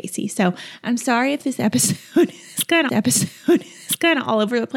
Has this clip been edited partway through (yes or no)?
yes